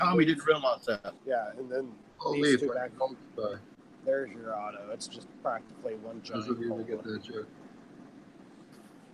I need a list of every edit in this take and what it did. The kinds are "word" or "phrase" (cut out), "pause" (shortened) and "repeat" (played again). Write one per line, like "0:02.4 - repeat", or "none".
0:01.2 - pause
0:03.7 - pause